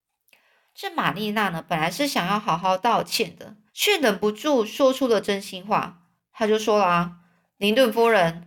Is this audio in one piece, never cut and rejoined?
no; 1 cut; at 3.7 s

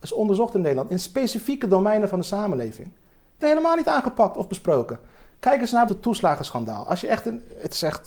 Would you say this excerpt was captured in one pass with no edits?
no; 2 cuts; at 3.4 s, 5.9 s

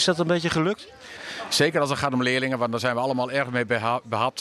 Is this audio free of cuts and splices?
yes; 0 cuts

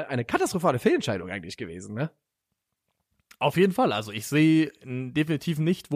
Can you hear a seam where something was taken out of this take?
no; 0 cuts

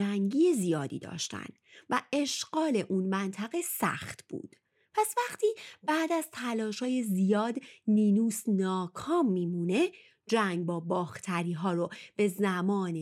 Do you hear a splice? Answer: no; 0 cuts

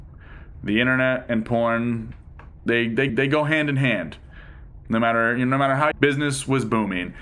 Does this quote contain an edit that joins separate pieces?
yes; 2 cuts; at 3.1 s, 5.9 s

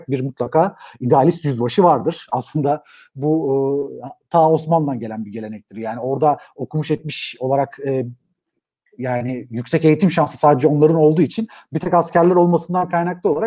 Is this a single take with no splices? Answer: yes; 0 cuts

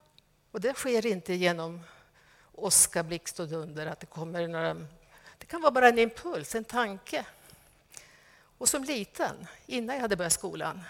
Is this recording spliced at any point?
no; 0 cuts

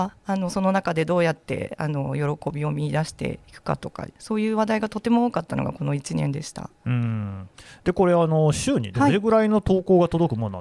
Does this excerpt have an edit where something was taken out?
yes; 3 cuts; at 3.4 s, 4.1 s, 8.9 s

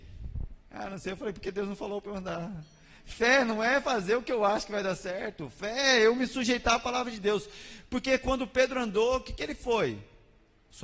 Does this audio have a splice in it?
no; 0 cuts

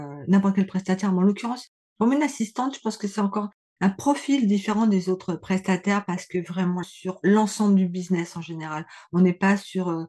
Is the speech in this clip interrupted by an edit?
yes; 1 cut; at 6.8 s

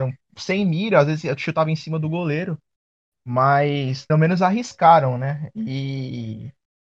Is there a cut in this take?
yes; 1 cut; at 4.1 s

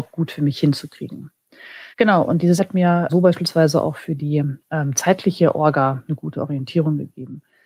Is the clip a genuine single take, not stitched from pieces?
no; 5 cuts; at 1.9 s, 2.6 s, 3.1 s, 4.6 s, 6.1 s

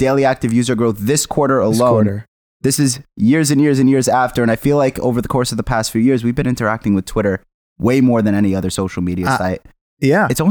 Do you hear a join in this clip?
no; 0 cuts

